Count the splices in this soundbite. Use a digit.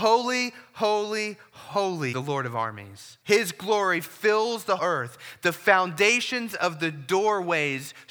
3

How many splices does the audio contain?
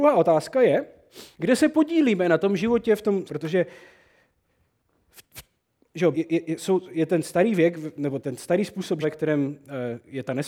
5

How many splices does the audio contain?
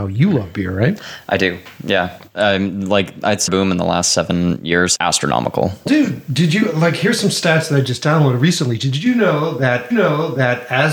4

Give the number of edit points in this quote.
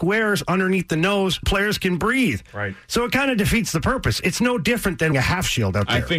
2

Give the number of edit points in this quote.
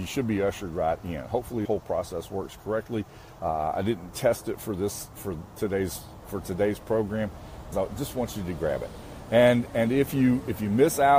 3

